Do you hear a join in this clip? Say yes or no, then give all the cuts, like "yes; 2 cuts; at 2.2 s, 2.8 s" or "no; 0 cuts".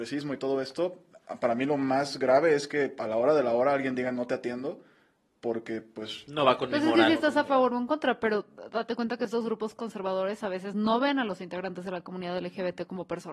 no; 0 cuts